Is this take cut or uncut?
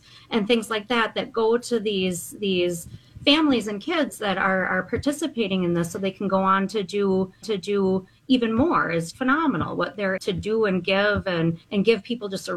cut